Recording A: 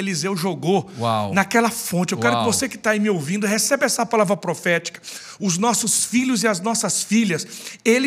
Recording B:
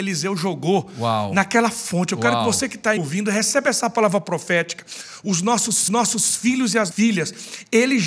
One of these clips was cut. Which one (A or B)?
B